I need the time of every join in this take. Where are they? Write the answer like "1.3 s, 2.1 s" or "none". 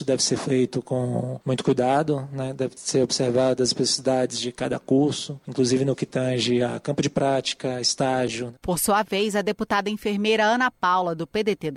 none